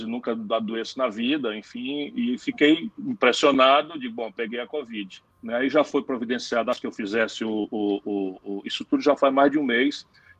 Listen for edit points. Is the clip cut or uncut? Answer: cut